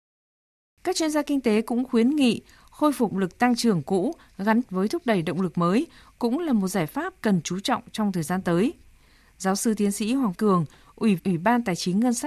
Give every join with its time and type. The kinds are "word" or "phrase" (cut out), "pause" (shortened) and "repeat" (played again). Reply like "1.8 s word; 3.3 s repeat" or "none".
3.1 s word; 4.6 s word; 10.3 s word; 11.2 s word